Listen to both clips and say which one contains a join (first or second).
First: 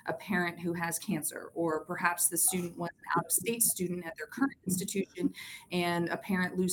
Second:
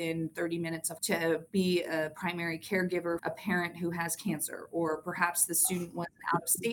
second